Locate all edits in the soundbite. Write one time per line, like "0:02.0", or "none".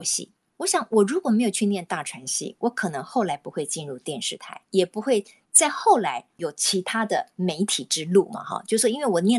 0:04.7